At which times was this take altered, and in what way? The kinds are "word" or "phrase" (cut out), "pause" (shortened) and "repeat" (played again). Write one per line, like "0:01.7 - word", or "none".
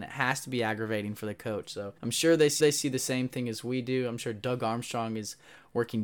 0:02.0 - pause
0:02.6 - repeat